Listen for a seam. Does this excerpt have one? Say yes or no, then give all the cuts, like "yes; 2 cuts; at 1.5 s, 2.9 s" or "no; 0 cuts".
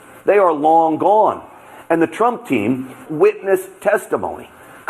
yes; 1 cut; at 3.1 s